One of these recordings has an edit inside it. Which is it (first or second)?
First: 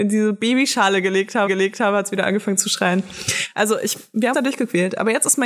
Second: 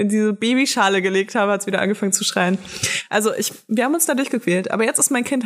first